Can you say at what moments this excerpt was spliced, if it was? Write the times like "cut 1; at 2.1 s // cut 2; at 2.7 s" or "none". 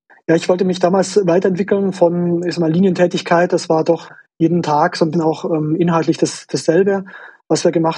cut 1; at 5.1 s

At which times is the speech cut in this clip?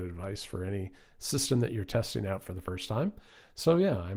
none

